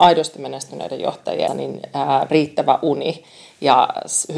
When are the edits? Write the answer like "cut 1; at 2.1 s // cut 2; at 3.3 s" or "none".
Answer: cut 1; at 1.5 s // cut 2; at 2.3 s